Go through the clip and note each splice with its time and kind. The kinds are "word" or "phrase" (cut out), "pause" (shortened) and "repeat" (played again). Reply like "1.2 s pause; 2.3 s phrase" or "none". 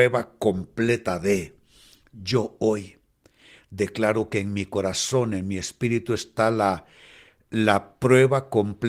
none

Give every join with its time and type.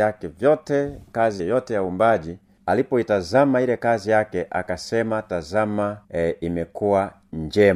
1.4 s word; 6.0 s pause

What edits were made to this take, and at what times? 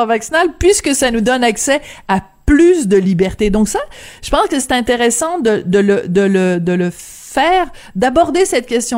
none

